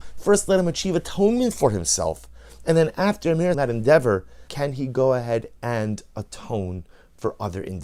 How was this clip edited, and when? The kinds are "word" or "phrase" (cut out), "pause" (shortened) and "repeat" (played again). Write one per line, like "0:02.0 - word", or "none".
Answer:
0:03.5 - phrase
0:04.5 - phrase